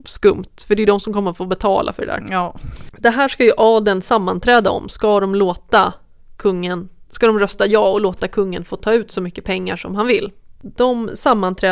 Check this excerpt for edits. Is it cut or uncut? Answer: uncut